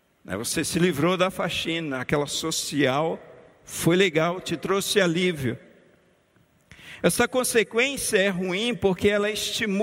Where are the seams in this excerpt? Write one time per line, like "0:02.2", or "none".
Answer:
none